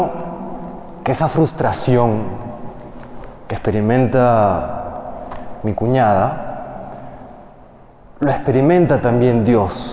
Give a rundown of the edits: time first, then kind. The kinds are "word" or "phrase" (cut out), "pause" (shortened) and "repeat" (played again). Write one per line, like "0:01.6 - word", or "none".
none